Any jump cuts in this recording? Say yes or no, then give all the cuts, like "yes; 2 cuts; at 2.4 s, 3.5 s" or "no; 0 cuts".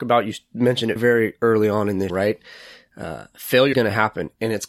yes; 3 cuts; at 1.0 s, 2.1 s, 3.7 s